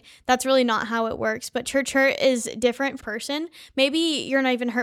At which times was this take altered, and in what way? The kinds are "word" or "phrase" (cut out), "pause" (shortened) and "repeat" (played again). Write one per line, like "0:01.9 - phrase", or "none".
0:03.0 - word